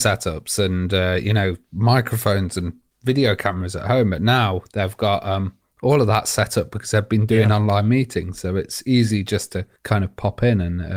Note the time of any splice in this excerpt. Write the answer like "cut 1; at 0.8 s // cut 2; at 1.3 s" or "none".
cut 1; at 1.6 s // cut 2; at 2.9 s // cut 3; at 9.8 s

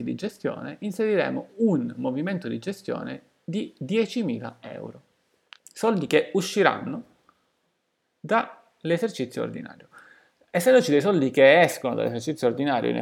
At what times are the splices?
none

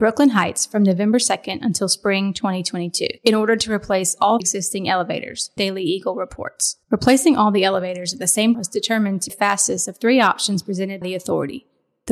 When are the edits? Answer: cut 1; at 3.2 s // cut 2; at 4.4 s // cut 3; at 5.6 s // cut 4; at 6.8 s // cut 5; at 8.5 s // cut 6; at 9.3 s // cut 7; at 11.0 s

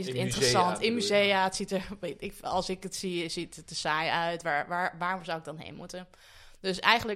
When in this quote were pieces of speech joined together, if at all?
none

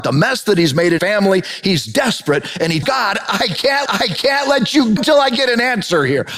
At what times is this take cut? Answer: cut 1; at 1.0 s // cut 2; at 2.8 s // cut 3; at 3.9 s // cut 4; at 5.0 s

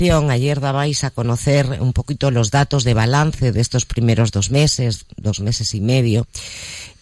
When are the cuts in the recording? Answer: none

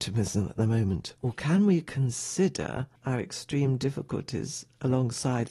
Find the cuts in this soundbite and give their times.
cut 1; at 1.2 s // cut 2; at 3.0 s

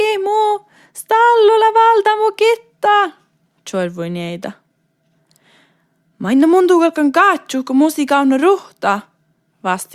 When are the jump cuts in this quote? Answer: none

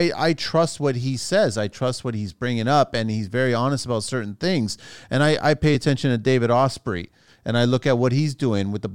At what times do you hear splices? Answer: none

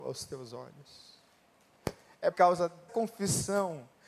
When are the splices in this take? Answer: cut 1; at 2.3 s // cut 2; at 2.9 s

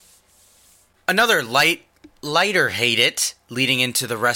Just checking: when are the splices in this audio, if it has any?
none

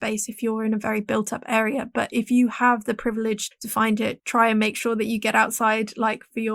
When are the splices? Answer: cut 1; at 3.5 s // cut 2; at 4.2 s

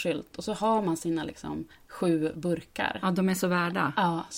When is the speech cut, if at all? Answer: cut 1; at 2.3 s

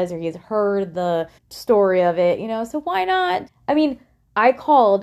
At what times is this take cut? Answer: cut 1; at 1.4 s // cut 2; at 3.5 s

